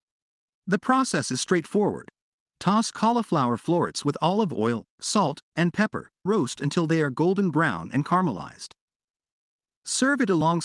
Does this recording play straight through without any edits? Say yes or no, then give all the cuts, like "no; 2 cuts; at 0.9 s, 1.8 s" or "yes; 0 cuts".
no; 1 cut; at 6.3 s